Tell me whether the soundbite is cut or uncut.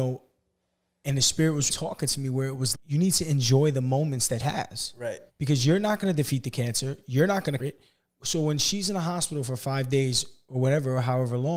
cut